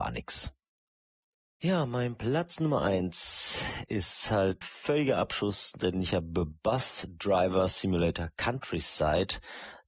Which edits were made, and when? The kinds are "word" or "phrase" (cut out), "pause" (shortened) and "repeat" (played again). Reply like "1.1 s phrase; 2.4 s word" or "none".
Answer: 4.6 s word